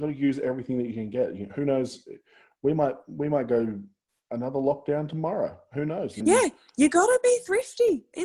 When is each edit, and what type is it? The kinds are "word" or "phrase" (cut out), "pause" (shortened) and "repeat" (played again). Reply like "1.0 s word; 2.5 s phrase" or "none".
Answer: 6.2 s word